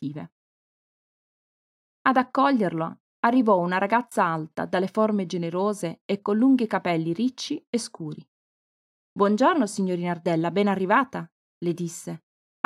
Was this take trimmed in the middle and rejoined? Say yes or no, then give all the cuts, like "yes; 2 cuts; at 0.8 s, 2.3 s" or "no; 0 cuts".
no; 0 cuts